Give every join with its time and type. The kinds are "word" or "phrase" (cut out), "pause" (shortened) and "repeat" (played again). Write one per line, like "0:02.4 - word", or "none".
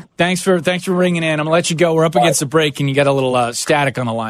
none

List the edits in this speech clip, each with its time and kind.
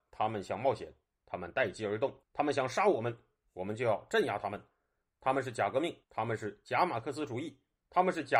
0:02.2 - pause
0:06.0 - pause

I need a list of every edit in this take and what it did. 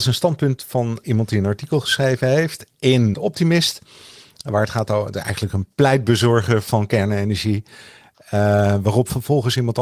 0:01.0 - word
0:03.1 - word

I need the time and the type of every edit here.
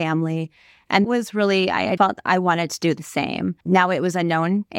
0:01.0 - word
0:02.0 - word
0:03.6 - pause

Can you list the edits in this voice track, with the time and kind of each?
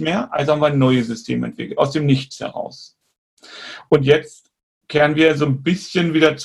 none

